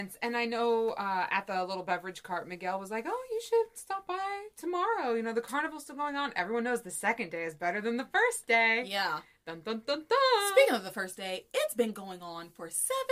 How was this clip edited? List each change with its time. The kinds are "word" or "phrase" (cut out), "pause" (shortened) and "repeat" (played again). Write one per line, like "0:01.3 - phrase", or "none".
none